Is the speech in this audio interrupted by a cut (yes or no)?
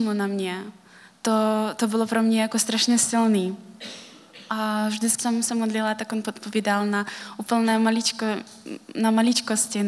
yes